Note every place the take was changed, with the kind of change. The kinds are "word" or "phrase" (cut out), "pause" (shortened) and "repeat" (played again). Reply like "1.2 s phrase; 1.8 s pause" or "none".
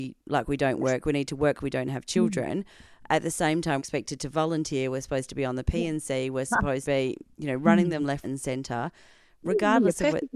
1.6 s word; 3.8 s word; 6.8 s word; 8.2 s word